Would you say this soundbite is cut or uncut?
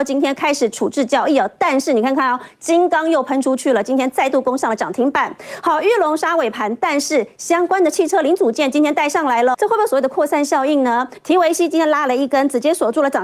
cut